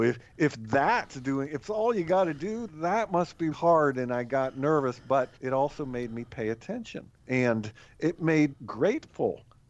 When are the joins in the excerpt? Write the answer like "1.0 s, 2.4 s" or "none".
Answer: 1.6 s, 2.7 s, 3.5 s, 5.4 s, 7.2 s, 8.5 s